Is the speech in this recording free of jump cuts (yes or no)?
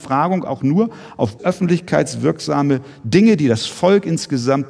no